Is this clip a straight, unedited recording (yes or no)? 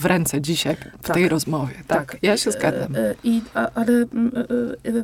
yes